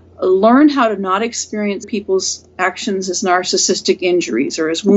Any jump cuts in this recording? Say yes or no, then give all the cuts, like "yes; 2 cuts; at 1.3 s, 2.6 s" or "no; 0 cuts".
yes; 1 cut; at 1.8 s